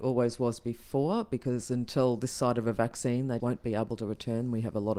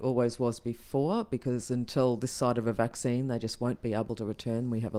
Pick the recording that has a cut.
first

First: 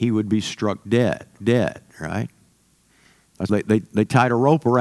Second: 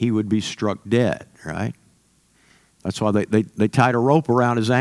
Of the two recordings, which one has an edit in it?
first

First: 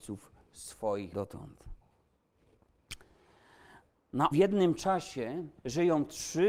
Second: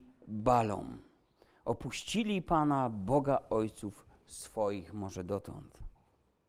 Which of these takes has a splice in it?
first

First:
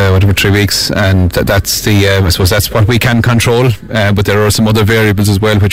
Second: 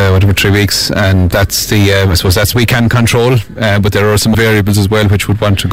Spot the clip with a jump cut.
second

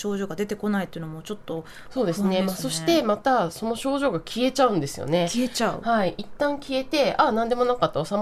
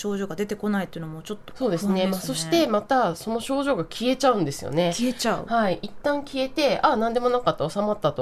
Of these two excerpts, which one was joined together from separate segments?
second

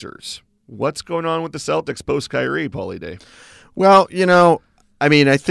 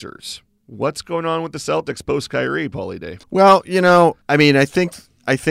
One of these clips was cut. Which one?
second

